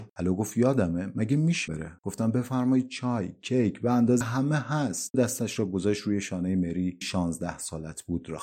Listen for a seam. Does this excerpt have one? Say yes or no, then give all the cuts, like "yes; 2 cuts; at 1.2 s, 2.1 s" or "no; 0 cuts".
yes; 4 cuts; at 1.7 s, 4.2 s, 5.1 s, 7.0 s